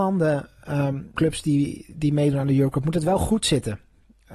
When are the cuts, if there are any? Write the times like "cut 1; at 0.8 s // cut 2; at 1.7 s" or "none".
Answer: cut 1; at 1.2 s

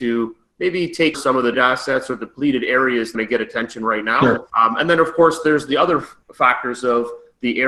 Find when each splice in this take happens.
cut 1; at 1.1 s // cut 2; at 1.5 s // cut 3; at 3.1 s // cut 4; at 4.5 s // cut 5; at 6.2 s

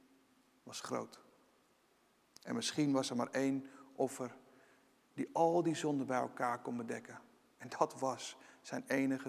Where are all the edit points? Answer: none

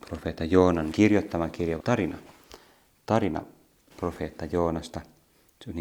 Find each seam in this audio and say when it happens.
cut 1; at 0.9 s // cut 2; at 1.8 s // cut 3; at 3.9 s

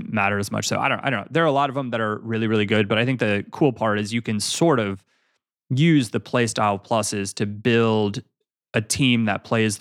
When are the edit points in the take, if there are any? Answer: none

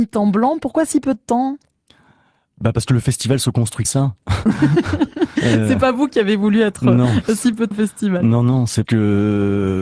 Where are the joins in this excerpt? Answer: cut 1; at 3.8 s // cut 2; at 5.4 s // cut 3; at 7.7 s // cut 4; at 8.8 s

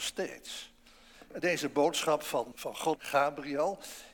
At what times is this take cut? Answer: cut 1; at 1.4 s // cut 2; at 2.5 s // cut 3; at 3.0 s

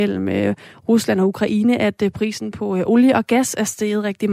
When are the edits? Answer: none

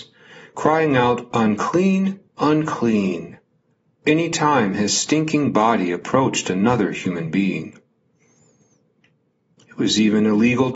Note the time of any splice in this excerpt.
cut 1; at 2.3 s

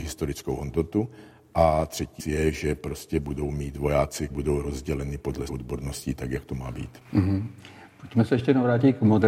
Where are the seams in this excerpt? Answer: cut 1; at 2.2 s // cut 2; at 4.3 s // cut 3; at 5.5 s

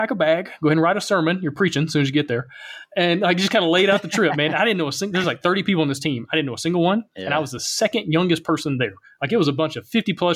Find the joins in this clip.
none

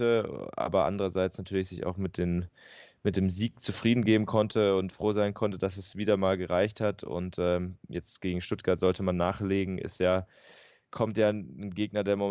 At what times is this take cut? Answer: none

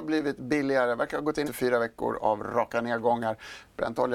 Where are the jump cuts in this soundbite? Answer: cut 1; at 1.4 s

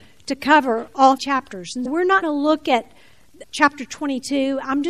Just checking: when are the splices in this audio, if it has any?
cut 1; at 1.2 s // cut 2; at 1.9 s // cut 3; at 2.2 s // cut 4; at 3.4 s

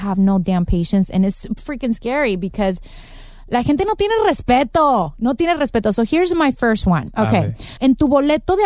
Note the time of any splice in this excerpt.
cut 1; at 1.6 s // cut 2; at 7.8 s

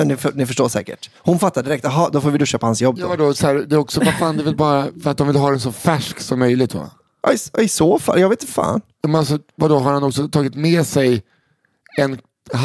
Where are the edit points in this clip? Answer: cut 1; at 1.2 s

